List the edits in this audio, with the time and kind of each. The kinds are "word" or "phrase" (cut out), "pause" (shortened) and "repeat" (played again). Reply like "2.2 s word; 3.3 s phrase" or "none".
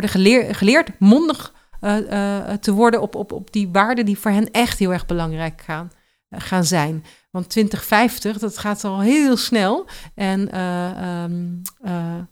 none